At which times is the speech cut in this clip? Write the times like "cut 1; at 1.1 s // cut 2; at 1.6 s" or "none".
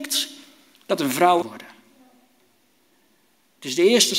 cut 1; at 1.4 s